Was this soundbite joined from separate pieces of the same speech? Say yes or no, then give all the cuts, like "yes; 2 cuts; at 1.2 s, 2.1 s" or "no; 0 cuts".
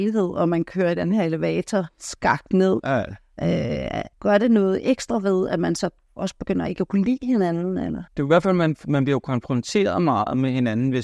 yes; 2 cuts; at 4.1 s, 8.1 s